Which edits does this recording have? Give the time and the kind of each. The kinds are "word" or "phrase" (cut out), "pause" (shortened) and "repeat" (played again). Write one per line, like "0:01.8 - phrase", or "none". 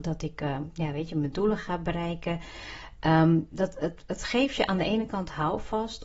none